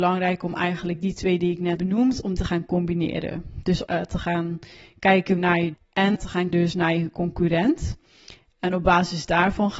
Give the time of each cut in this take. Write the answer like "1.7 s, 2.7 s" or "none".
1.4 s, 1.8 s, 2.4 s, 3.9 s, 5.4 s, 5.7 s, 6.1 s, 6.5 s